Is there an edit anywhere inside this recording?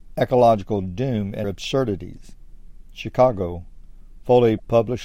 yes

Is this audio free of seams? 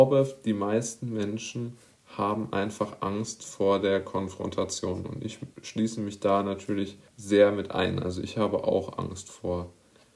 no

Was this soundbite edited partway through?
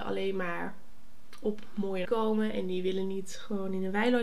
yes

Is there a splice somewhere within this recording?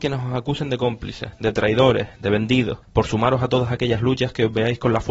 yes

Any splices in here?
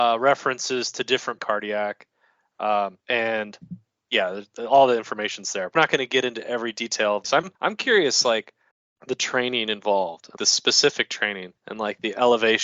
yes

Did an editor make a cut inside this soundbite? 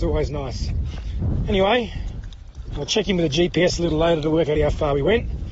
yes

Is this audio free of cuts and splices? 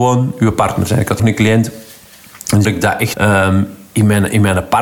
no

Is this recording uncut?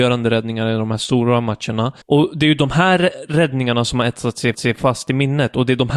no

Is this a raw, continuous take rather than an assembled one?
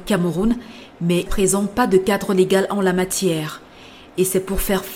no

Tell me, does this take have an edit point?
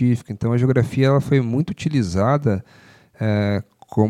no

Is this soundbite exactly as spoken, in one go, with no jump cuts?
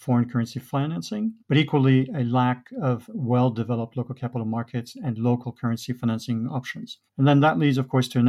no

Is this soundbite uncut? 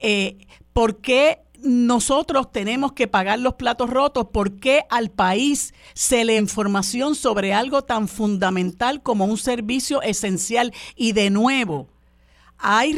no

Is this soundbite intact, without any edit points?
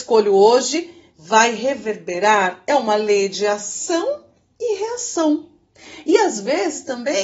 yes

